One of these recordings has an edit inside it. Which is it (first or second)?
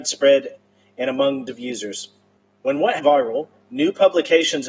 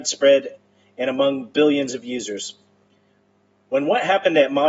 first